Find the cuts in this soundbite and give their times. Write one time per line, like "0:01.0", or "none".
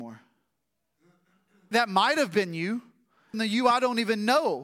0:01.7
0:03.3